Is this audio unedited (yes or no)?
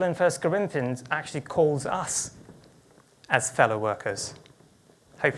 yes